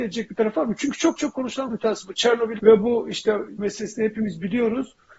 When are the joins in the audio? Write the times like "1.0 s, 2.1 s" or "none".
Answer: 1.2 s, 1.7 s, 2.6 s, 3.6 s

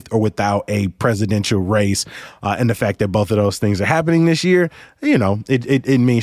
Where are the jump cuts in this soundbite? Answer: none

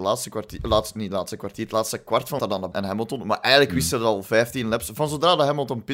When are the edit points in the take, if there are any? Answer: 2.4 s, 2.7 s

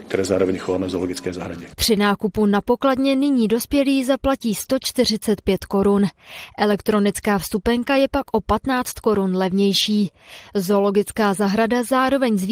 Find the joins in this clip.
none

